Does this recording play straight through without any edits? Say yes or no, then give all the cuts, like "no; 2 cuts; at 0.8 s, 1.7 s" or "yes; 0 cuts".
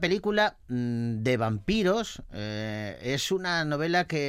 yes; 0 cuts